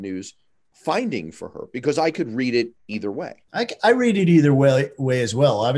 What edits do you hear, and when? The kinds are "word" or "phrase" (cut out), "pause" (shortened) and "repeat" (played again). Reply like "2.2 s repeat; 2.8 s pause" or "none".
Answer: 2.8 s pause; 3.4 s pause